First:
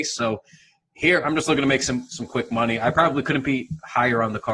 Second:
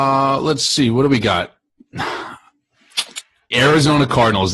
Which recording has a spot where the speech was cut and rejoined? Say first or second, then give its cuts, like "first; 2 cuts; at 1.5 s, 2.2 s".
second; 1 cut; at 3.5 s